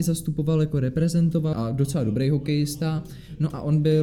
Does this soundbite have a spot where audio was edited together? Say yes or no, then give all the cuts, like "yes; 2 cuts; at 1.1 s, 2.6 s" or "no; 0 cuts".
yes; 1 cut; at 1.5 s